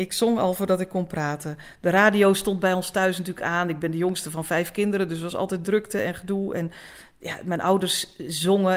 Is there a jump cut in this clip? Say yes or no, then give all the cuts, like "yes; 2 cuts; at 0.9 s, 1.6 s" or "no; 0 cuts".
no; 0 cuts